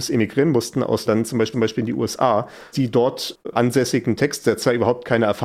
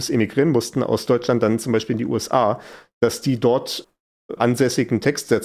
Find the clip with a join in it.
first; 4 cuts; at 1.1 s, 1.5 s, 2.7 s, 3.4 s

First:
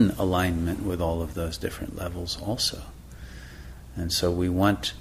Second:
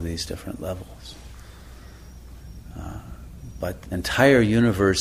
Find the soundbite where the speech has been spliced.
second; 1 cut; at 3.9 s

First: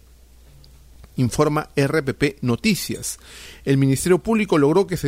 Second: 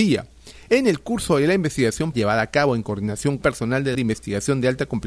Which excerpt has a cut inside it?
second; 3 cuts; at 2.1 s, 3.4 s, 3.9 s

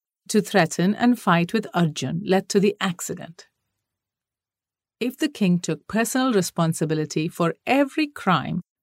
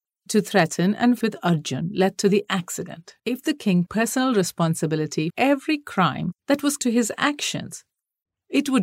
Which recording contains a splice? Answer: second; 6 cuts; at 1.2 s, 3.2 s, 3.9 s, 5.3 s, 6.4 s, 6.8 s

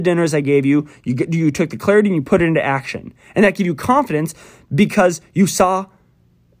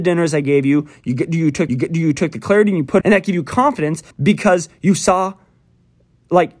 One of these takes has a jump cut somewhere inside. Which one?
second; 3 cuts; at 1.7 s, 3.0 s, 4.1 s

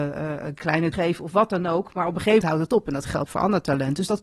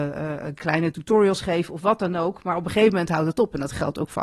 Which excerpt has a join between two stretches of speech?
first; 3 cuts; at 0.9 s, 2.4 s, 3.3 s

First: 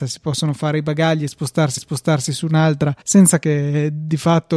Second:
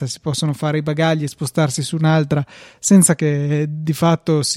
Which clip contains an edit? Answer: first; 2 cuts; at 1.8 s, 3.0 s

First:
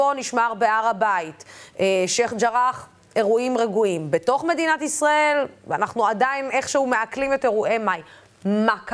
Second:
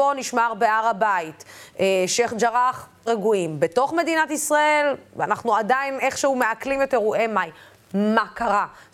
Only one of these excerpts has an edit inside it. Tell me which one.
second; 1 cut; at 3.1 s

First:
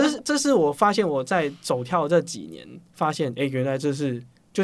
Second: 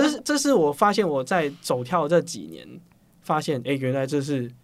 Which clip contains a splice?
first; 1 cut; at 2.9 s

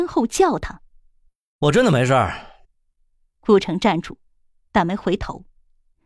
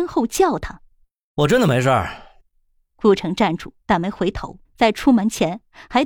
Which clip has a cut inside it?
second; 4 cuts; at 0.9 s, 2.5 s, 3.8 s, 4.6 s

